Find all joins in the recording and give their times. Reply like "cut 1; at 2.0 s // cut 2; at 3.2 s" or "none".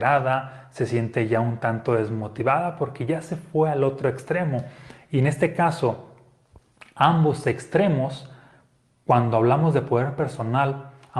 none